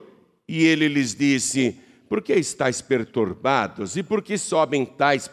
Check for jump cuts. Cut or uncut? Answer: uncut